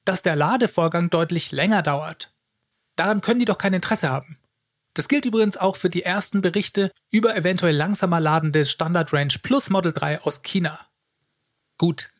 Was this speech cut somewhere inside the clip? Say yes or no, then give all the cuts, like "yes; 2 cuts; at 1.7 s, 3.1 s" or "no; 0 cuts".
no; 0 cuts